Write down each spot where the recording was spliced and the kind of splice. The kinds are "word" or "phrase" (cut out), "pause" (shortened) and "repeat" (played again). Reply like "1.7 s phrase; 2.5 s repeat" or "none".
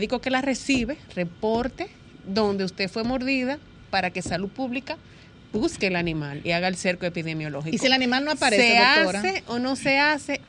none